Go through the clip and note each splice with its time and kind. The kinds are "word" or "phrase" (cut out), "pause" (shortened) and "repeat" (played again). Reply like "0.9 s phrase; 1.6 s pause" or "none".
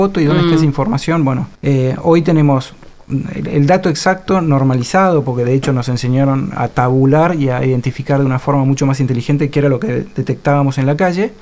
1.6 s pause; 6.6 s word